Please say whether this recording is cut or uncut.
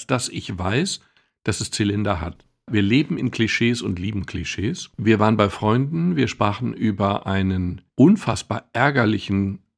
uncut